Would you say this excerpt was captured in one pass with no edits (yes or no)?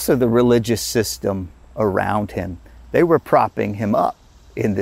yes